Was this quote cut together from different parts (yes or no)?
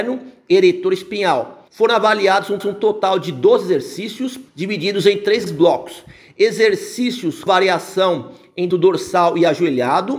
yes